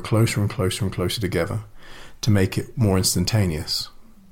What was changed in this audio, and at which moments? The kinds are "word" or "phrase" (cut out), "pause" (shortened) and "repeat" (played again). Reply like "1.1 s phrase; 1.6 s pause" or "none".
none

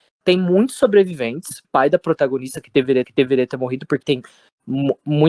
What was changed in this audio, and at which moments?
1.6 s word; 3.0 s repeat; 4.0 s word

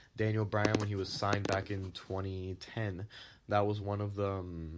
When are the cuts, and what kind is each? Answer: none

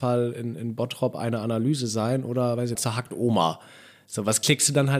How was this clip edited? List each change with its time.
2.7 s phrase

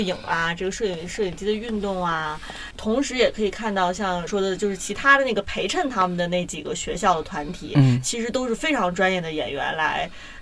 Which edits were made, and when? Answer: 4.3 s word

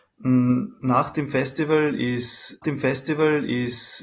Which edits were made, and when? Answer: 2.6 s repeat

